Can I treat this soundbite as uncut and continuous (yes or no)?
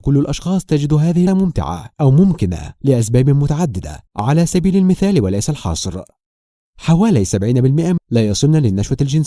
no